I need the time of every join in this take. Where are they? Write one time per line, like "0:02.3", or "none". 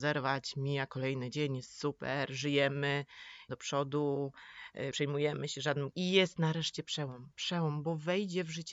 0:03.5
0:04.9
0:05.9

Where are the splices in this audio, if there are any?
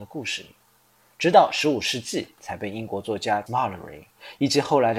0:03.5

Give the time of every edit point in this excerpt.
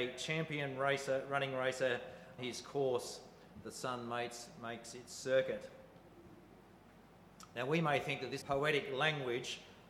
0:02.4
0:08.4

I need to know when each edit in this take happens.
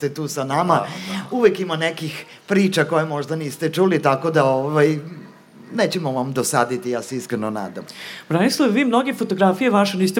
none

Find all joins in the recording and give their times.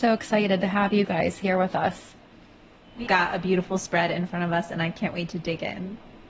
0:03.1

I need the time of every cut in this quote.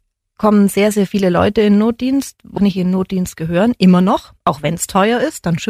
0:02.6

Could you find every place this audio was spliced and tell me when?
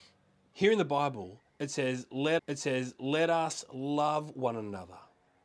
0:02.4

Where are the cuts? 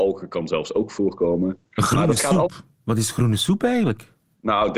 none

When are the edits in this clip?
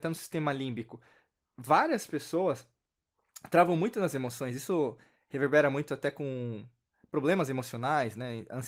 none

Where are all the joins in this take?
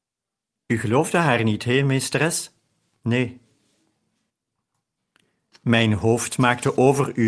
none

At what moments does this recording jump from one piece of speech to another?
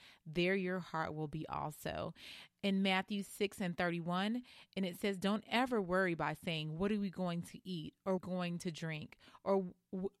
0:08.2

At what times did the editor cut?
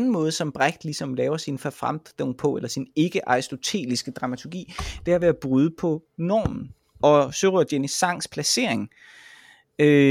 none

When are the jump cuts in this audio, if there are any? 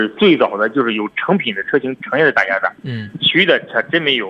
0:02.8

